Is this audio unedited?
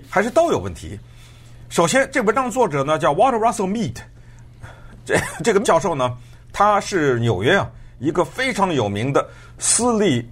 no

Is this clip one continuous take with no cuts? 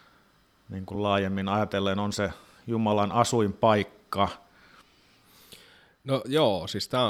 yes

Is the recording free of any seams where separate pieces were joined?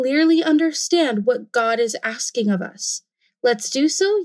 yes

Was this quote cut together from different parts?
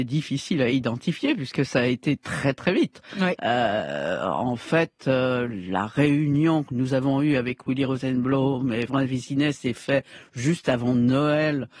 yes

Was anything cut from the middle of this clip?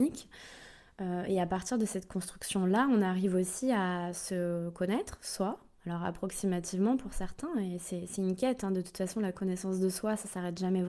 no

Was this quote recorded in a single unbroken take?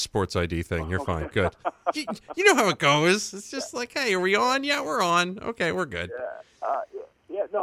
no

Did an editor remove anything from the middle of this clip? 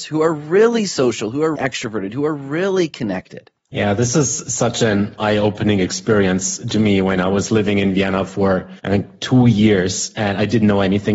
yes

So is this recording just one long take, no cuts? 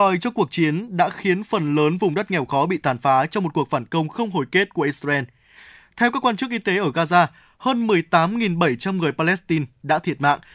yes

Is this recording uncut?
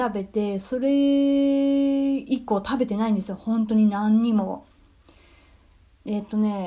yes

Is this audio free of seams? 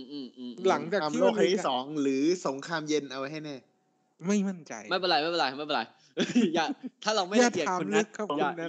yes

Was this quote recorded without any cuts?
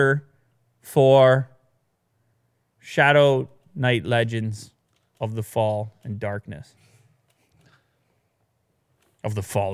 yes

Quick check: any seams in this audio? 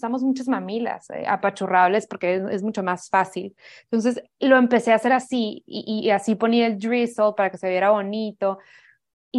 no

